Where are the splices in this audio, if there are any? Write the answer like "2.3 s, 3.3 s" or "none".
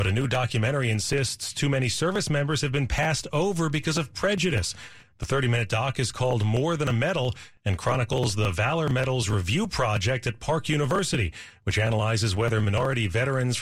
none

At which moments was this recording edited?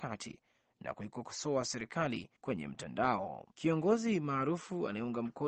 2.4 s

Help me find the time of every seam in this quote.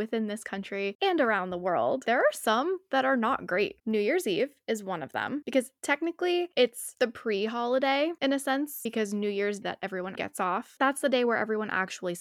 9.6 s, 10.1 s

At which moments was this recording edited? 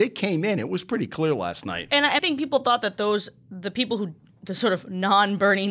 2.2 s

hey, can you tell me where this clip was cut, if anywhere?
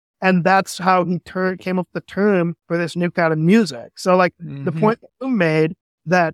2.6 s, 5.1 s

